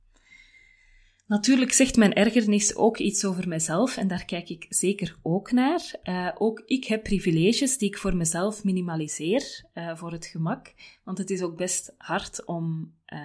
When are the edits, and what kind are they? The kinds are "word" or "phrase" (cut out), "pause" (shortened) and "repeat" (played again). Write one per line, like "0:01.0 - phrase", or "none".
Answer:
none